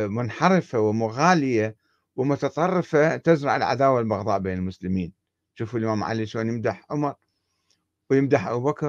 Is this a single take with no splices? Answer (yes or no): yes